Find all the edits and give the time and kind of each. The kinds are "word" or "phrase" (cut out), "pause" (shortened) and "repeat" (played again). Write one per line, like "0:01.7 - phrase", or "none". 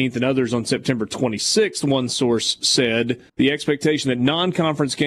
0:03.3 - pause